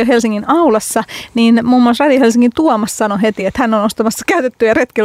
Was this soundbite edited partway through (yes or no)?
no